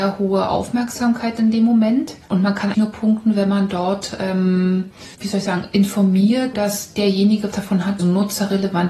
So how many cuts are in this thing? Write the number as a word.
six